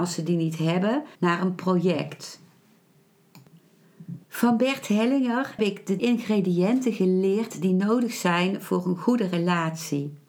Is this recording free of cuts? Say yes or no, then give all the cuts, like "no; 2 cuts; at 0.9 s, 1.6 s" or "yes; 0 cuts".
no; 4 cuts; at 1.1 s, 4.2 s, 5.6 s, 6.0 s